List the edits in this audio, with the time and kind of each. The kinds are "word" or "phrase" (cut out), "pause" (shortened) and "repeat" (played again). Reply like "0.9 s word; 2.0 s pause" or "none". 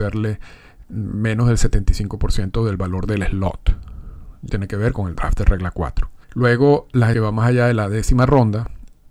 4.5 s word; 6.2 s pause; 7.1 s phrase